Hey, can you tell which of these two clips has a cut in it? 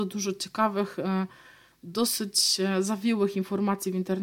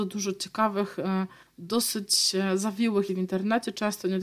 second; 2 cuts; at 1.4 s, 3.1 s

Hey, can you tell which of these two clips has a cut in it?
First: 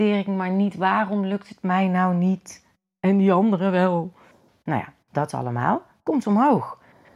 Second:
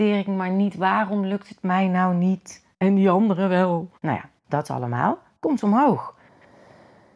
second; 2 cuts; at 2.7 s, 4.0 s

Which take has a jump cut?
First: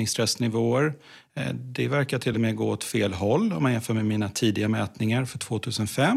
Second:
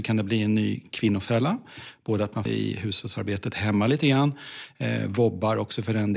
second; 1 cut; at 2.5 s

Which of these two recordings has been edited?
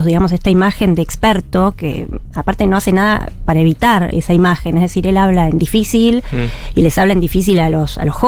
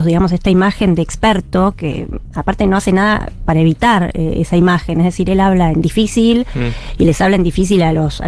first; 1 cut; at 4.1 s

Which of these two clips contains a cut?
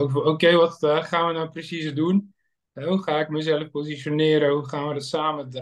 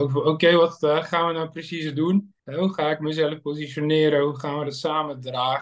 second; 1 cut; at 2.4 s

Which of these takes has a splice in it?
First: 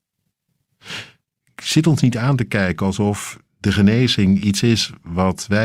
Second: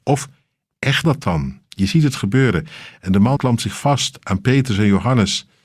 second; 2 cuts; at 1.0 s, 3.4 s

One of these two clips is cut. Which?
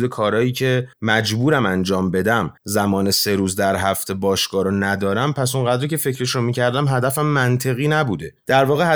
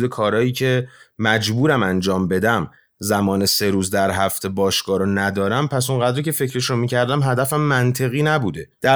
first; 2 cuts; at 0.9 s, 2.6 s

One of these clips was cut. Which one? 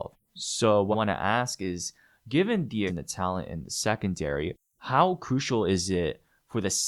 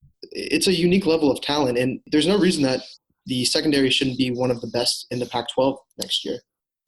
first; 2 cuts; at 0.9 s, 2.9 s

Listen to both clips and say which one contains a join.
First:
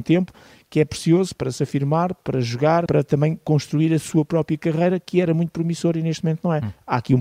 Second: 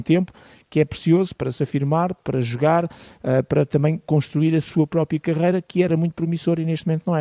first; 1 cut; at 2.9 s

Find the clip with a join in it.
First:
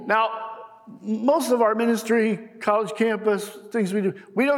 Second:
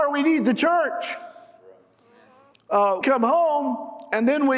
second; 1 cut; at 3.0 s

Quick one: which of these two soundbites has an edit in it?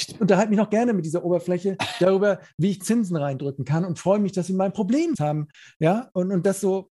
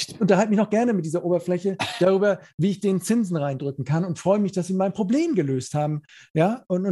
first; 2 cuts; at 2.8 s, 5.2 s

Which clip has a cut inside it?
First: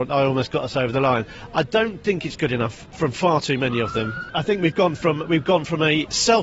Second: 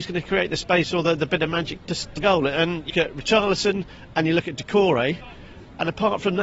second; 3 cuts; at 1.8 s, 2.2 s, 2.9 s

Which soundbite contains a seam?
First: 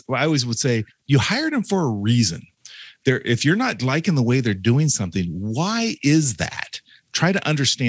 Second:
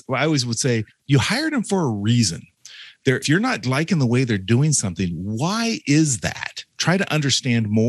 second; 2 cuts; at 3.2 s, 6.7 s

